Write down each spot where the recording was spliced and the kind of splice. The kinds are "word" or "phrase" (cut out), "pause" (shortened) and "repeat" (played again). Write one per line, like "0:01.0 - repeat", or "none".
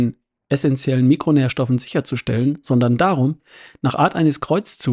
none